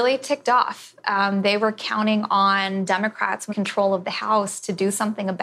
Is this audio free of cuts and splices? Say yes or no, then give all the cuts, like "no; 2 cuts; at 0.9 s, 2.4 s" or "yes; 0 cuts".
no; 1 cut; at 3.5 s